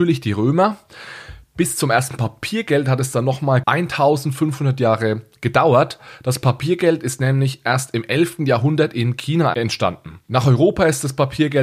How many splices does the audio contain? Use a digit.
2